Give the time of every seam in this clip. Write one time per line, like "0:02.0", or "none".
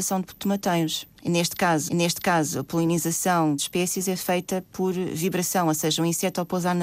0:01.2
0:01.9
0:03.6